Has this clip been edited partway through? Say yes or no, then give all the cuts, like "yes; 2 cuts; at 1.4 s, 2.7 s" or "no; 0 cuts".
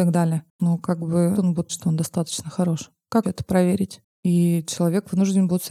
yes; 3 cuts; at 1.4 s, 1.7 s, 3.2 s